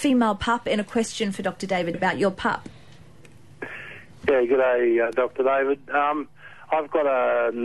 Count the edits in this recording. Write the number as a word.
one